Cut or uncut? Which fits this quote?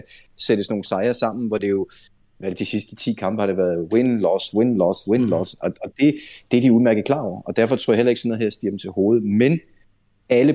uncut